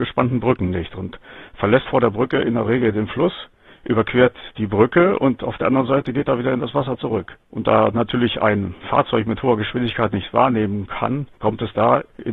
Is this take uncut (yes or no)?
no